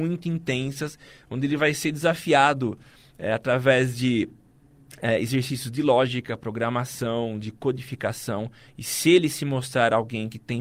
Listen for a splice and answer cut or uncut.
uncut